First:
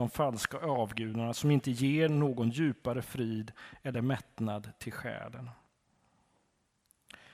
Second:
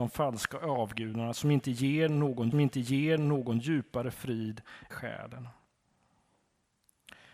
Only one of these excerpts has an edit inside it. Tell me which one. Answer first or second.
second